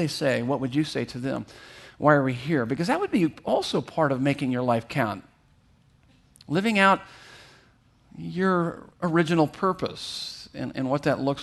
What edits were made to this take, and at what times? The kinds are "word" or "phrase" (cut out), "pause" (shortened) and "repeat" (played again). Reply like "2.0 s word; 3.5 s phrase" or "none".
8.9 s pause